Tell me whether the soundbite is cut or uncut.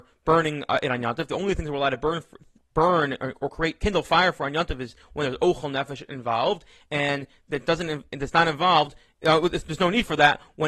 uncut